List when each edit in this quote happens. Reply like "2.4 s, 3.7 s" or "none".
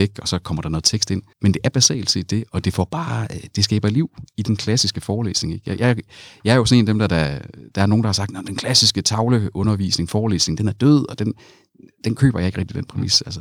1.3 s